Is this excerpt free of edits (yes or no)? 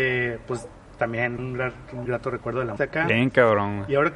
no